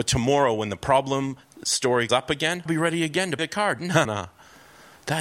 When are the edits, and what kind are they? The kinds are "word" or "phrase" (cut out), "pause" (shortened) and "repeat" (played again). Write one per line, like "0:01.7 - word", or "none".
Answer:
0:02.1 - word
0:02.7 - word
0:03.4 - word
0:04.0 - word